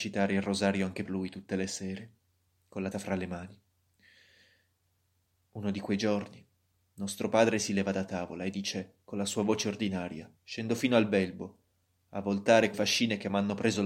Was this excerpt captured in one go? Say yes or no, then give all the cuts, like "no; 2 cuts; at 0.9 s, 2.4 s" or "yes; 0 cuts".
no; 4 cuts; at 1.1 s, 2.9 s, 10.4 s, 12.7 s